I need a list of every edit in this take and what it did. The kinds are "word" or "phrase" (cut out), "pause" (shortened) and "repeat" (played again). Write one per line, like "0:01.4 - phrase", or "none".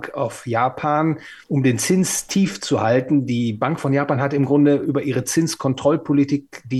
0:01.4 - pause